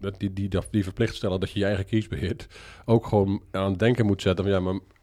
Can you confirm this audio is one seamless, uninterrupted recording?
yes; 0 cuts

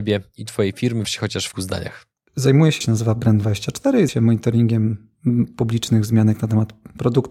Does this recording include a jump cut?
yes; 4 cuts; at 1.0 s, 1.5 s, 2.8 s, 4.1 s

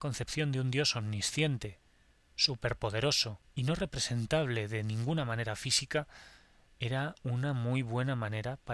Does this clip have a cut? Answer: no; 0 cuts

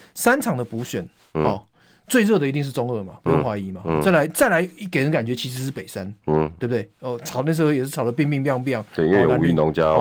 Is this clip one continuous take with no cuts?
yes; 0 cuts

